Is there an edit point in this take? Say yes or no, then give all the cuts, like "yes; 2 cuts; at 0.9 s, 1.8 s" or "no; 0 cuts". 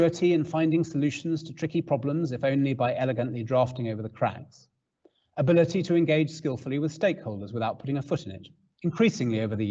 no; 0 cuts